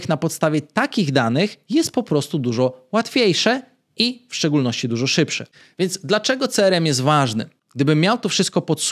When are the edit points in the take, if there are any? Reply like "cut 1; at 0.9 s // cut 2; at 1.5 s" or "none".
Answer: none